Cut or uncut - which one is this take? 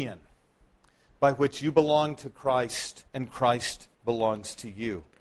cut